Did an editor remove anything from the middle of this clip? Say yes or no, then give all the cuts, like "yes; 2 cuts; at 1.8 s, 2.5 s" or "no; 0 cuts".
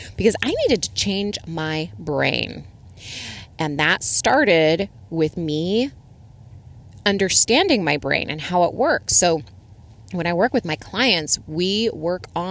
no; 0 cuts